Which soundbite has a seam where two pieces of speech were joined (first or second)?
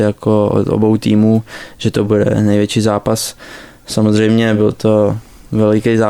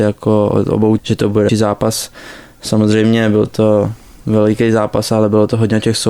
second